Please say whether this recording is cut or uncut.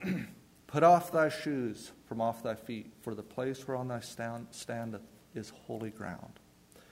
uncut